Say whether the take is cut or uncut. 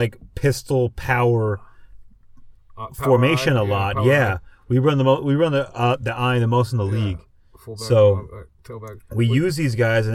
uncut